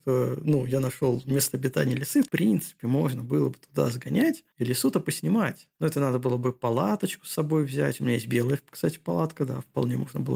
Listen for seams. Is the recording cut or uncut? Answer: cut